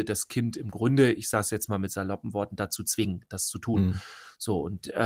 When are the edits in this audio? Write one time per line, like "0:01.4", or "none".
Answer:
none